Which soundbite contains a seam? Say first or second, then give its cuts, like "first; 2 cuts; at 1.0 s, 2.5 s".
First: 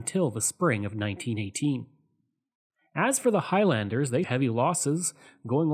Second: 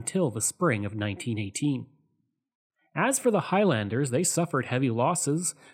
first; 1 cut; at 4.2 s